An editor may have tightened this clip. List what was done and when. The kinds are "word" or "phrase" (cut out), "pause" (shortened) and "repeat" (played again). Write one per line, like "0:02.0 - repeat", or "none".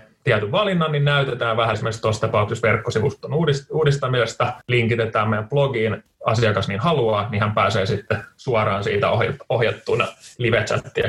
0:01.7 - word
0:04.6 - pause
0:06.1 - phrase